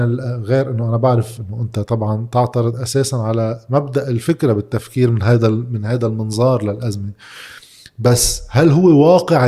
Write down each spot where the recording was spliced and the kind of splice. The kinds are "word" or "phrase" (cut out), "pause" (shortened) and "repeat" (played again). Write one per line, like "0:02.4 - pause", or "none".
none